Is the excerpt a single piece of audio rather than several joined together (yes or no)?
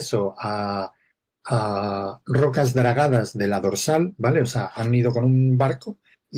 yes